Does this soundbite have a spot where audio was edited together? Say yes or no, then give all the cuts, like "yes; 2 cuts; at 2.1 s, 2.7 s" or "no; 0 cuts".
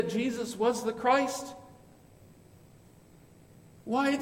no; 0 cuts